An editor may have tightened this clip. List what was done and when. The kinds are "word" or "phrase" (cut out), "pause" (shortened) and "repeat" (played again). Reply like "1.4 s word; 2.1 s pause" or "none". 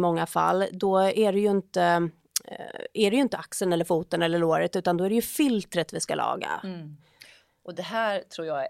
none